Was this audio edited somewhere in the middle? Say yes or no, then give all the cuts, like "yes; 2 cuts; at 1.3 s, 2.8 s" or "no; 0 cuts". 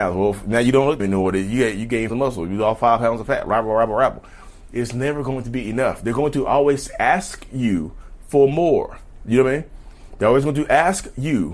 yes; 2 cuts; at 1.0 s, 2.1 s